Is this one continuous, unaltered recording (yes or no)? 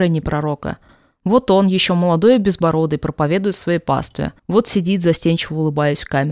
no